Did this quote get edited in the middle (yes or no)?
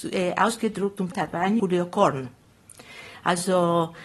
yes